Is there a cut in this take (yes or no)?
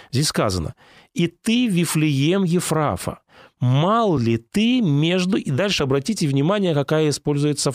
no